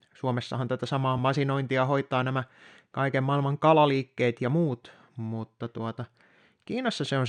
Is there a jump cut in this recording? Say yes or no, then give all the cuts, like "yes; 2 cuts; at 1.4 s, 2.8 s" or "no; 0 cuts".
no; 0 cuts